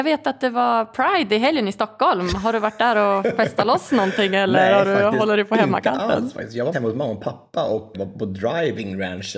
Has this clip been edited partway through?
yes; 2 cuts; at 6.7 s, 7.9 s

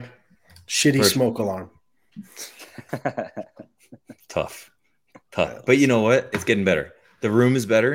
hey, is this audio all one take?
yes; 0 cuts

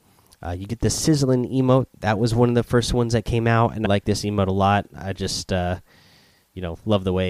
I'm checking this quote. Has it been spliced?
yes; 1 cut; at 3.8 s

